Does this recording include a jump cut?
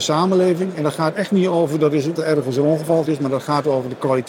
yes; 2 cuts; at 2.1 s, 3.0 s

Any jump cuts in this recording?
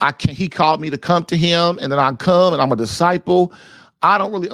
no; 0 cuts

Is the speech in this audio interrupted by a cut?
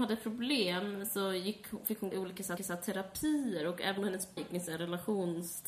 yes; 4 cuts; at 2.1 s, 2.6 s, 4.0 s, 4.4 s

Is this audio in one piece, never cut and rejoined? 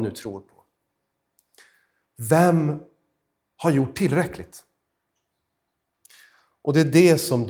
yes; 0 cuts

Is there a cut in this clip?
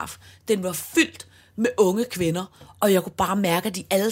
no; 0 cuts

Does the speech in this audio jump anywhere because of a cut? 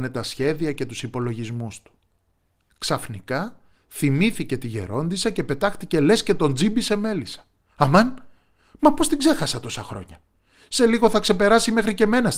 no; 0 cuts

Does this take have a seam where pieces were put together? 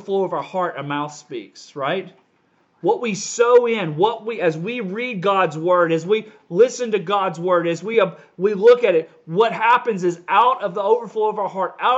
no; 0 cuts

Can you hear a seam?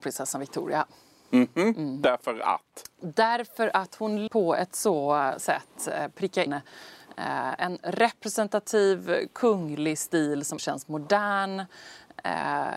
yes; 4 cuts; at 4.3 s, 5.4 s, 6.5 s, 10.6 s

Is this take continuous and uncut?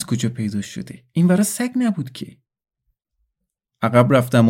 yes; 0 cuts

